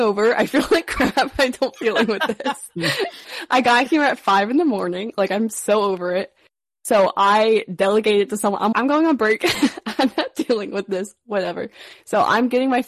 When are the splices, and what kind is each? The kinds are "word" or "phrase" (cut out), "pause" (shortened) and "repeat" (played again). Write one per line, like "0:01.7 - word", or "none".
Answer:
0:01.8 - word
0:08.7 - word